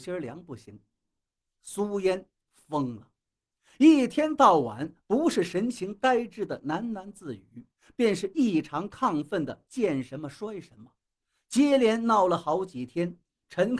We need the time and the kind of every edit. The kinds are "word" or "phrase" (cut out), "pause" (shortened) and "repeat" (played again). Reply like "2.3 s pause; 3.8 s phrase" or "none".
none